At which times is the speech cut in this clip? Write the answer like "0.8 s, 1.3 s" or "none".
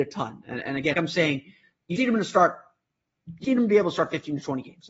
0.9 s, 2.0 s, 3.4 s